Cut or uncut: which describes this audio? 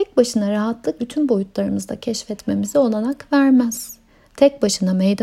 cut